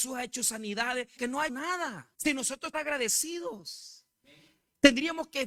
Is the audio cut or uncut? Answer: cut